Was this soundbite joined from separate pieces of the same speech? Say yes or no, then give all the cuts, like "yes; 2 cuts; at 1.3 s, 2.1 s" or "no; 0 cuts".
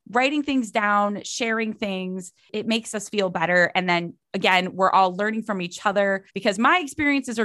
yes; 1 cut; at 6.3 s